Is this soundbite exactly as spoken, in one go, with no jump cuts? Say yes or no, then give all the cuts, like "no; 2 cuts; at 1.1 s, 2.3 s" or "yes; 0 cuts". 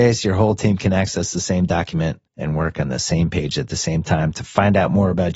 no; 1 cut; at 2.3 s